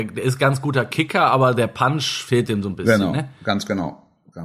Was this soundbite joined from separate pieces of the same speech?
no; 0 cuts

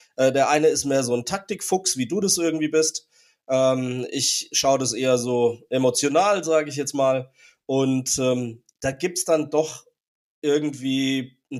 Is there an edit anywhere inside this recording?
no; 0 cuts

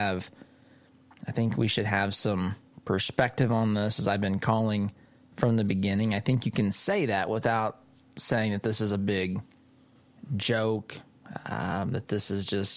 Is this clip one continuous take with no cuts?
yes; 0 cuts

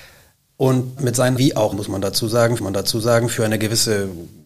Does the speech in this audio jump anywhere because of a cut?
yes; 4 cuts; at 1.0 s, 1.4 s, 1.7 s, 2.6 s

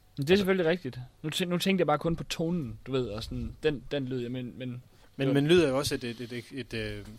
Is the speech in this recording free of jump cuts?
yes; 0 cuts

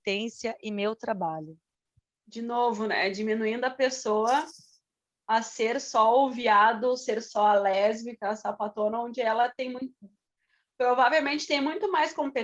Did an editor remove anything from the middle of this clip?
no; 0 cuts

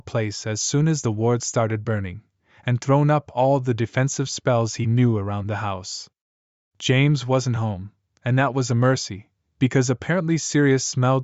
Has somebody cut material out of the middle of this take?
no; 0 cuts

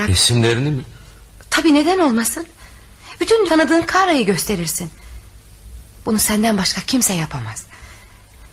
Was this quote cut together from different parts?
yes; 1 cut; at 3.5 s

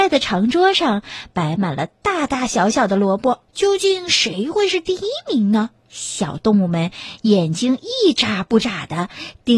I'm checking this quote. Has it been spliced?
yes; 2 cuts; at 3.4 s, 5.8 s

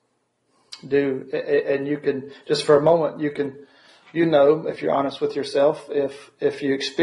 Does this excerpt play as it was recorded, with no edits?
yes; 0 cuts

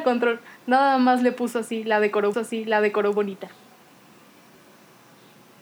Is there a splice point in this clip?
yes; 1 cut; at 2.3 s

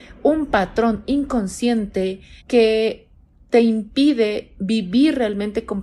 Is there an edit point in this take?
yes; 1 cut; at 2.4 s

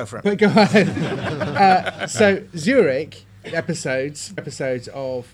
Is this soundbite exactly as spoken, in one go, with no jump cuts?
no; 2 cuts; at 3.4 s, 4.4 s

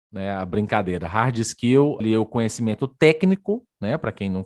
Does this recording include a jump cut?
yes; 1 cut; at 2.0 s

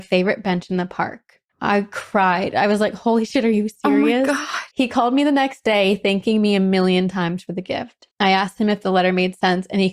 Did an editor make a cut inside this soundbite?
yes; 3 cuts; at 1.5 s, 4.7 s, 8.1 s

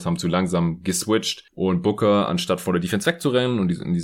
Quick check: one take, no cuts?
yes; 0 cuts

